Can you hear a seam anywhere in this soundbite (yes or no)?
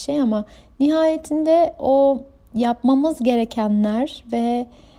no